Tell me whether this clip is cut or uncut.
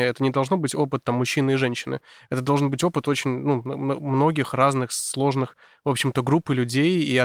uncut